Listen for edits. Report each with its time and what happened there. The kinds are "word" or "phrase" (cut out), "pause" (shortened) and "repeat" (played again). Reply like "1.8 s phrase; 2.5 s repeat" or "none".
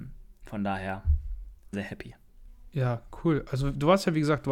1.7 s word